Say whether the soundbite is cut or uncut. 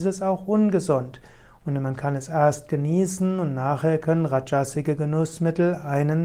uncut